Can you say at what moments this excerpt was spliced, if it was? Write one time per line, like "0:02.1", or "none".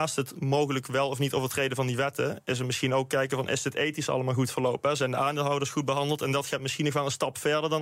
none